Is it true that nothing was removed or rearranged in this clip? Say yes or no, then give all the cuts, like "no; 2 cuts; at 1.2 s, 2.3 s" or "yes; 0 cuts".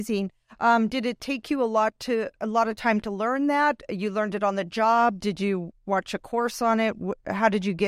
yes; 0 cuts